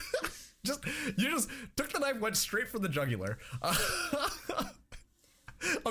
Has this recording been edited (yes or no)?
no